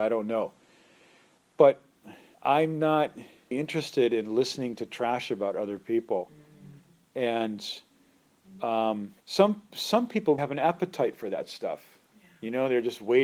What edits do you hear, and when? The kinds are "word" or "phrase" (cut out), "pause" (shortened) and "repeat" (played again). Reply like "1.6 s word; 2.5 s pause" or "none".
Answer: 2.3 s pause; 3.5 s word; 9.2 s pause; 10.4 s word